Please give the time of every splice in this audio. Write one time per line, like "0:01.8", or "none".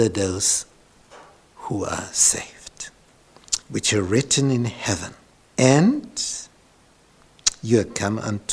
0:03.6
0:05.4